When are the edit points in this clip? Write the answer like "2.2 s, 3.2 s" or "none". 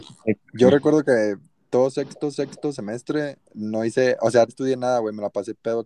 2.3 s, 4.5 s